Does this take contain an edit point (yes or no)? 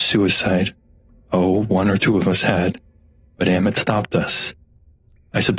no